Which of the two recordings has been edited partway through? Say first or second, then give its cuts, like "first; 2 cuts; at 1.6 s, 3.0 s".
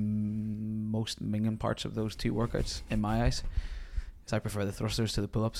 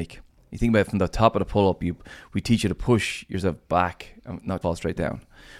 second; 1 cut; at 4.6 s